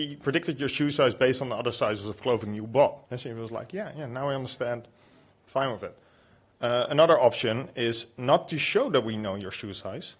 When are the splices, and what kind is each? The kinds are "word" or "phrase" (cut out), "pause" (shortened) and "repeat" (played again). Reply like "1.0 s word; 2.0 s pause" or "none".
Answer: 3.0 s pause